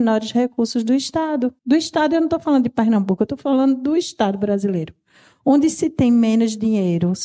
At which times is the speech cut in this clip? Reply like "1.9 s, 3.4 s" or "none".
1.6 s